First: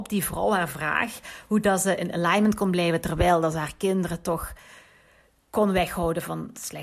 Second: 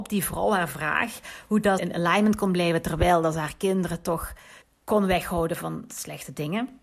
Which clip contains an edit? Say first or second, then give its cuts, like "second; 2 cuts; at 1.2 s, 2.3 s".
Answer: second; 2 cuts; at 1.8 s, 4.6 s